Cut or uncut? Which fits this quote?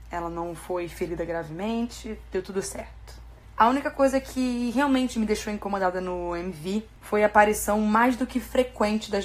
uncut